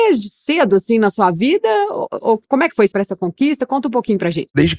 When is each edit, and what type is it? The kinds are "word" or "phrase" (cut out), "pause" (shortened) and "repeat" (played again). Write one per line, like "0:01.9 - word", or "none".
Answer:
0:02.9 - phrase